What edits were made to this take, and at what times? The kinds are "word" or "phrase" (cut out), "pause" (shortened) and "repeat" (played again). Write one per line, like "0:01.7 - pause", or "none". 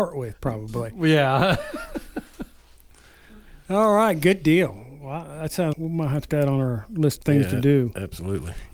0:05.7 - word
0:06.3 - word
0:07.2 - word